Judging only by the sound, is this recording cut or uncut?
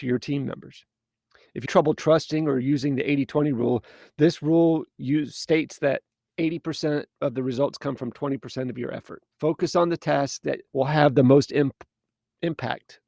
cut